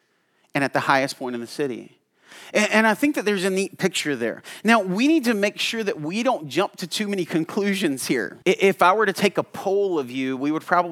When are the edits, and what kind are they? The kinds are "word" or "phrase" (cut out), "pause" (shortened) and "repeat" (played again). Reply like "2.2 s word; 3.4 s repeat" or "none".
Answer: 8.4 s pause